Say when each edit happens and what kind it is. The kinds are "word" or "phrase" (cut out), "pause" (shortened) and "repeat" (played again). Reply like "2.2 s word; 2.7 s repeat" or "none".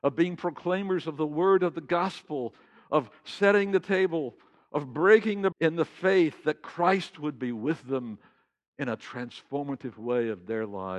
5.5 s word